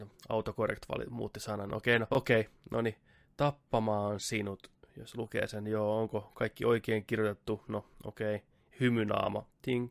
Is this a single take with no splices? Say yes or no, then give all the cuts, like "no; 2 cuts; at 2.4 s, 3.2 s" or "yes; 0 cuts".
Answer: yes; 0 cuts